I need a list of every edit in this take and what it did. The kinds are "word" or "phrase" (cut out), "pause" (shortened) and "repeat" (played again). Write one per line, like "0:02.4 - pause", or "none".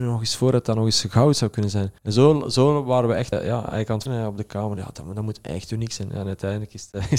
0:02.0 - pause
0:03.3 - word
0:04.1 - word